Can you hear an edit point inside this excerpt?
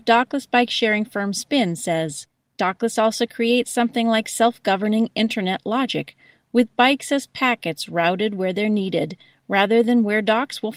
no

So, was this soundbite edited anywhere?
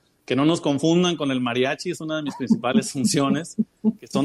no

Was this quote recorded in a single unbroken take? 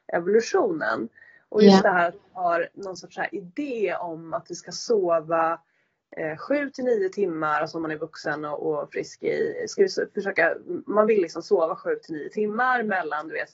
yes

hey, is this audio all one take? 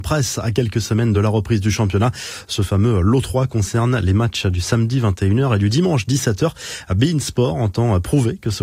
yes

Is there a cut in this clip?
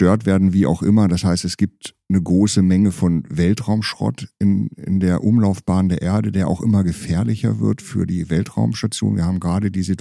no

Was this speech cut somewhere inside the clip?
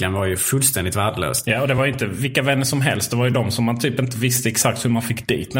no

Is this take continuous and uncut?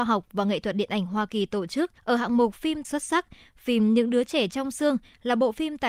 no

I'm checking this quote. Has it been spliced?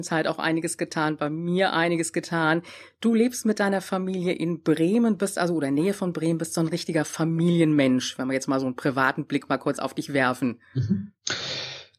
no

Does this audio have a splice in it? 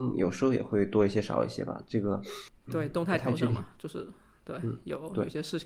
yes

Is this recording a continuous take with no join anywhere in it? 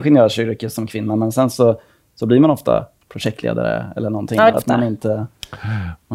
no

